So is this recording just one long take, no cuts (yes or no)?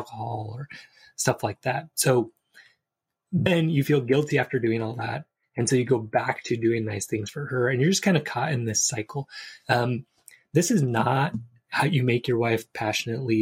yes